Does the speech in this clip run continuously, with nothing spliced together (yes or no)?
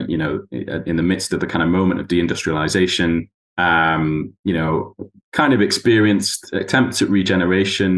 no